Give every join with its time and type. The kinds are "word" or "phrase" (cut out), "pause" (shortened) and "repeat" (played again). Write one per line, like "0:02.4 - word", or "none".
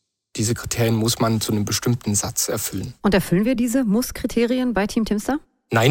none